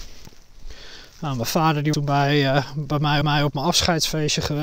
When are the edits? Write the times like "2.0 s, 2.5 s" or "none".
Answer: 1.9 s, 3.2 s